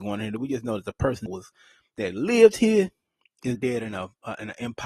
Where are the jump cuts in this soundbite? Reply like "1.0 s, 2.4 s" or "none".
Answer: 1.3 s, 3.5 s